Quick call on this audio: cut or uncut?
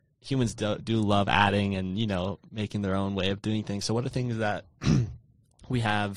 uncut